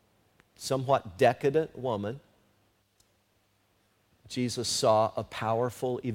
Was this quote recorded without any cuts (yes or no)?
yes